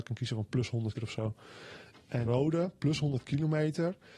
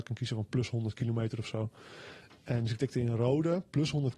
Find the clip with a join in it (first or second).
first